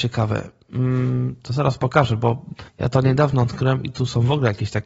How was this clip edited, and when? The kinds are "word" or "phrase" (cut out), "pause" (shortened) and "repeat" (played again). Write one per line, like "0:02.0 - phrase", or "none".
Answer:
0:02.7 - pause